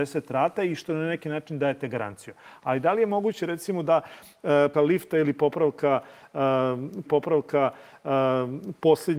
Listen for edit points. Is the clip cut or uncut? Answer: cut